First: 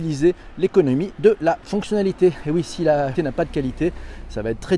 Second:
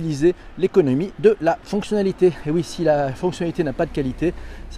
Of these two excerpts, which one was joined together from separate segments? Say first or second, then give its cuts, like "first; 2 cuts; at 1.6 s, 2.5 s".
first; 1 cut; at 3.2 s